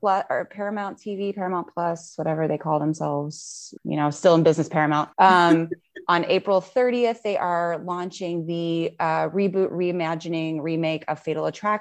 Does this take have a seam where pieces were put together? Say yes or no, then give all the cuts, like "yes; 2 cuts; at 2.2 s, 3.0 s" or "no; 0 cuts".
yes; 2 cuts; at 3.8 s, 5.1 s